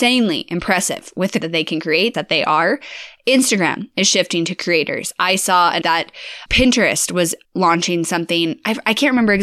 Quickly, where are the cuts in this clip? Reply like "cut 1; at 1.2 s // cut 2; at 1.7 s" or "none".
cut 1; at 1.4 s // cut 2; at 2.1 s // cut 3; at 5.8 s // cut 4; at 6.5 s // cut 5; at 7.4 s